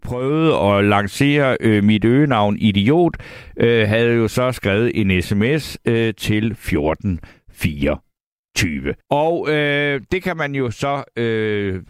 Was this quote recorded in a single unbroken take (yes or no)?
no